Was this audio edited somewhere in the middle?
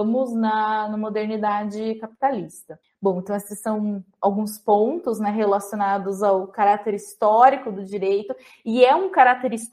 yes; 1 cut; at 2.8 s

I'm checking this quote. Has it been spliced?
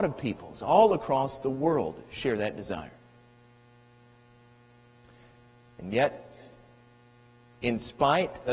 no; 0 cuts

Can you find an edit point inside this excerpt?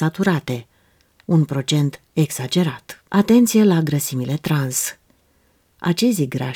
yes; 1 cut; at 3.1 s

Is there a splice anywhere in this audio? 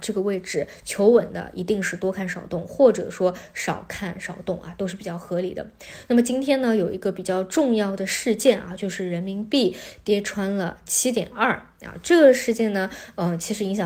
no; 0 cuts

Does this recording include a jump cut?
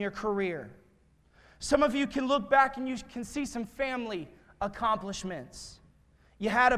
no; 0 cuts

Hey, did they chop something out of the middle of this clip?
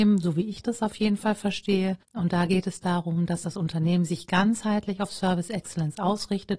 yes; 1 cut; at 2.0 s

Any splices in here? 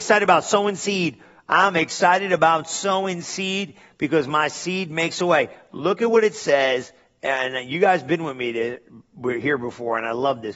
no; 0 cuts

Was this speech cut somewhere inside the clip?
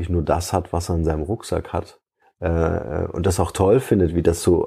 yes; 1 cut; at 2.2 s

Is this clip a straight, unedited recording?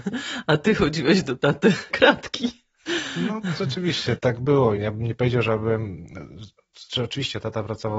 no; 3 cuts; at 1.9 s, 4.2 s, 4.8 s

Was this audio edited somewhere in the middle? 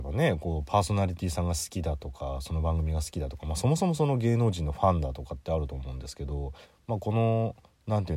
yes; 1 cut; at 6.6 s

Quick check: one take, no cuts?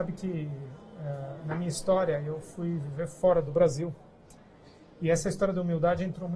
yes; 0 cuts

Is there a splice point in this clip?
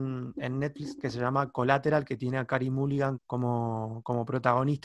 yes; 1 cut; at 3.2 s

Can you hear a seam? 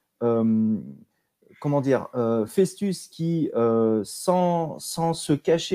no; 0 cuts

